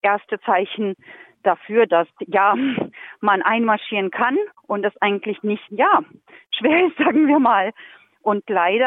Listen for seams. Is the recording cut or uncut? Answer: cut